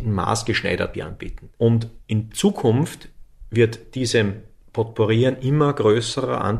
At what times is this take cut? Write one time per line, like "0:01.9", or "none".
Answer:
0:00.9

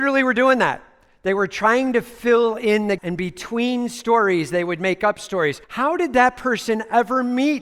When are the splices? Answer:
0:03.0
0:05.6

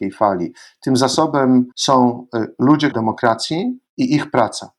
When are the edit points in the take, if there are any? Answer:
0:01.7
0:02.9
0:03.9

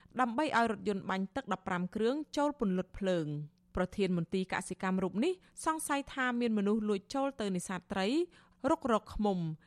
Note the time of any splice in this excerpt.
none

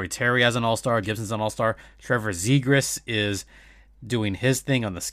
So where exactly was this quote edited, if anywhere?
0:01.0

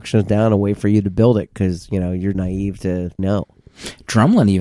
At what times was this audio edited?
0:02.3
0:03.2

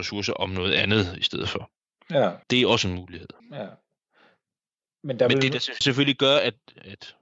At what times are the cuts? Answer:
0:02.4
0:03.4
0:05.8

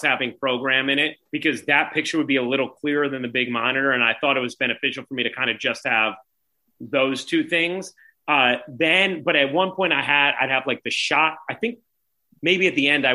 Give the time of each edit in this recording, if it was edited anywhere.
0:01.3

